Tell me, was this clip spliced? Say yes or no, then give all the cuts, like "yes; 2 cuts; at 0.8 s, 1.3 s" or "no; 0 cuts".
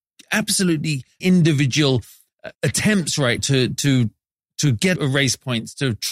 yes; 4 cuts; at 1.2 s, 2.5 s, 3.4 s, 5.0 s